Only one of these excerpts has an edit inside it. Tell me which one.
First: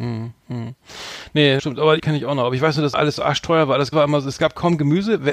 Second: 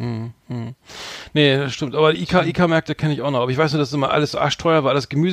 first; 4 cuts; at 1.6 s, 2.0 s, 2.9 s, 3.9 s

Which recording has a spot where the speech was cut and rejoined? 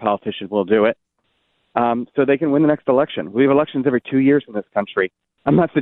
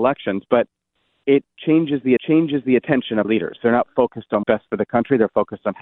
second; 4 cuts; at 1.2 s, 2.2 s, 3.2 s, 4.4 s

